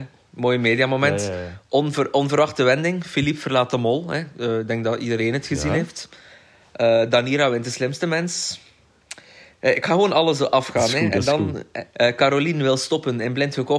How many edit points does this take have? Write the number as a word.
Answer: one